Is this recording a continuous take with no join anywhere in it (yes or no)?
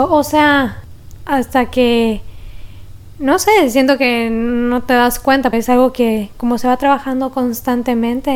no